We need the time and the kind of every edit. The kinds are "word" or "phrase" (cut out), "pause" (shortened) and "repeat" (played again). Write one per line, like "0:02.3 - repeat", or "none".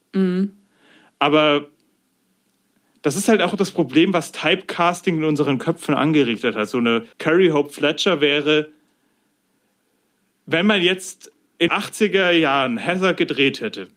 0:07.1 - pause
0:11.7 - word